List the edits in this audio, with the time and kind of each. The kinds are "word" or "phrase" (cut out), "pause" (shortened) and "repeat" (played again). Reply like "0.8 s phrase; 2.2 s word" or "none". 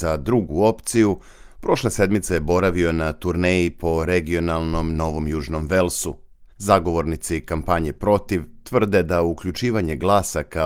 6.5 s pause